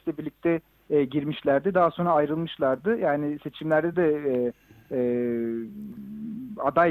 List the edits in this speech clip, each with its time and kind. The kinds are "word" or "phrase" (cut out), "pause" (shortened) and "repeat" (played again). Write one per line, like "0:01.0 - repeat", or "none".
none